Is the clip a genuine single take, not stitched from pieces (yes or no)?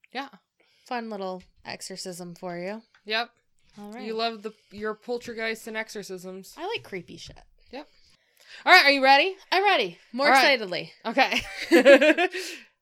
yes